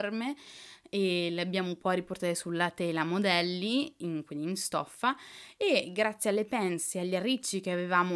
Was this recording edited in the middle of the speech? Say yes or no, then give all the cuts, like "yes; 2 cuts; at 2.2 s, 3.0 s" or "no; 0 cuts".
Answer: no; 0 cuts